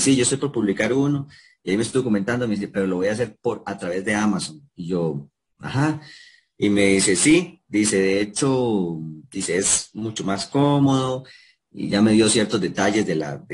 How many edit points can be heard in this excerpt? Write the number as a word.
zero